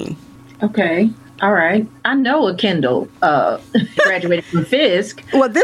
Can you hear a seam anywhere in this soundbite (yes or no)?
yes